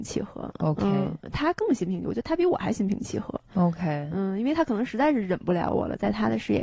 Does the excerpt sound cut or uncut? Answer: uncut